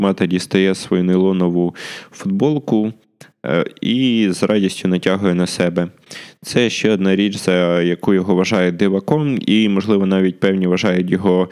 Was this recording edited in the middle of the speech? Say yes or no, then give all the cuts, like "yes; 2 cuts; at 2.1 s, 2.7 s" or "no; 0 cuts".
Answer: no; 0 cuts